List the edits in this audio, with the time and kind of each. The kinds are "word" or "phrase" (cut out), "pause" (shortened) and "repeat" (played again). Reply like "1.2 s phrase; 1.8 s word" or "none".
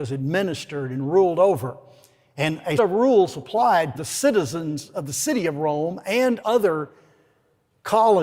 2.8 s word; 3.9 s word; 6.4 s word